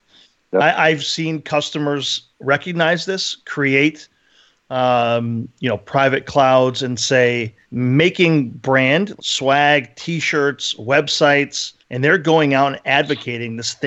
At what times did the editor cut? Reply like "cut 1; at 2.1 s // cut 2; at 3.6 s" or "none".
cut 1; at 2.3 s // cut 2; at 7.6 s // cut 3; at 9.2 s // cut 4; at 11.8 s

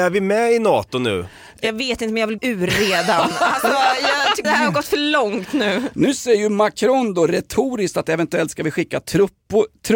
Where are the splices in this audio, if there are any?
cut 1; at 2.4 s // cut 2; at 4.4 s

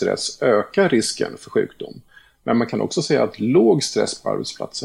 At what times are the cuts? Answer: none

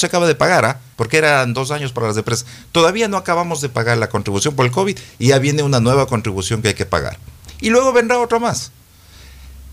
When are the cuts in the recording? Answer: cut 1; at 0.9 s

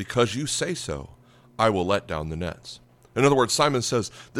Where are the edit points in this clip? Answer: none

